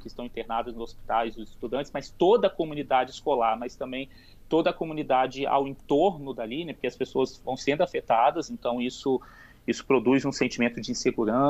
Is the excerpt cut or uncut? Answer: uncut